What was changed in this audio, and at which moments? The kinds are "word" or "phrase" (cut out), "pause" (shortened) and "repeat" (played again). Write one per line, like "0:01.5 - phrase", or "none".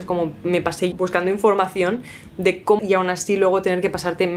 0:00.9 - word
0:02.8 - word